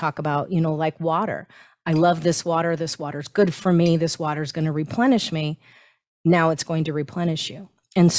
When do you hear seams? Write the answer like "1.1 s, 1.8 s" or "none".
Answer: none